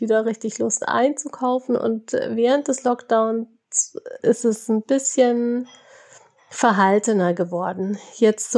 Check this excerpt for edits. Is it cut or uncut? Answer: uncut